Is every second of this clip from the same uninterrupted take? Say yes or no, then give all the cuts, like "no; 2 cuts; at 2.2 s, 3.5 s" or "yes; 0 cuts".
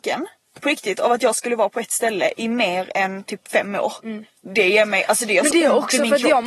yes; 0 cuts